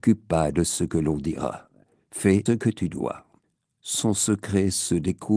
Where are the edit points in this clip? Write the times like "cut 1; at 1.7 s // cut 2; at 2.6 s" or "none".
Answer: cut 1; at 2.5 s // cut 2; at 3.4 s